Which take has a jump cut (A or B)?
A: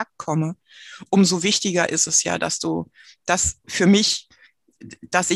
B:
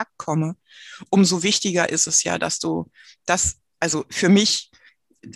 A